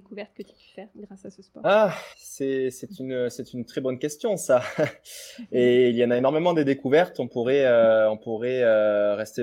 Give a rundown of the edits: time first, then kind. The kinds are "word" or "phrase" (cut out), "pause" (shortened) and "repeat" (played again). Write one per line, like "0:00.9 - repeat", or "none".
0:02.1 - pause